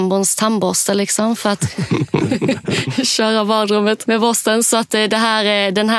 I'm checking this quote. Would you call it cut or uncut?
uncut